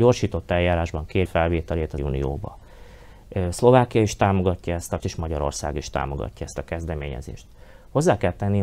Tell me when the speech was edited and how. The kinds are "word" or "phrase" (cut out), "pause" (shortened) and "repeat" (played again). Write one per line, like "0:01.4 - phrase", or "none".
0:01.3 - word
0:02.0 - word
0:05.0 - word